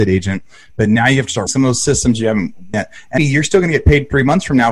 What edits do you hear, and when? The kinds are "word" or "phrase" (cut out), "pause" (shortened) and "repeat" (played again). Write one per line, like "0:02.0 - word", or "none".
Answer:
0:01.5 - word
0:02.7 - word
0:03.2 - word